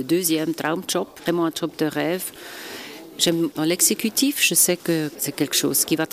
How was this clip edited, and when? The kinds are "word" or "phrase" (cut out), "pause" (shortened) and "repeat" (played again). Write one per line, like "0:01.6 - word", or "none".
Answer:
0:03.5 - phrase